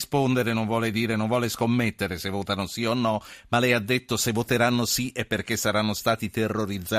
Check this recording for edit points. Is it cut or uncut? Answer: uncut